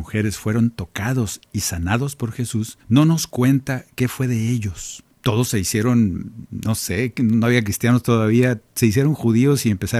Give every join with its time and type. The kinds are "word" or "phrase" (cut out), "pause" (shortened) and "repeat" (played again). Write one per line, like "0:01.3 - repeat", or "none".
0:02.8 - pause
0:05.1 - pause